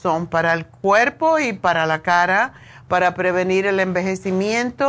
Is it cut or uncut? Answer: uncut